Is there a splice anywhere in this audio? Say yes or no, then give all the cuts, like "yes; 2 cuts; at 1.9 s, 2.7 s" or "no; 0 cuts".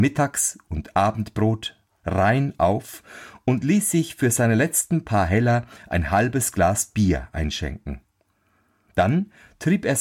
no; 0 cuts